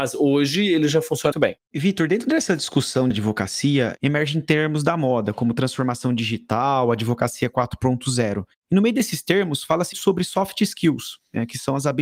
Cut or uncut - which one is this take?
cut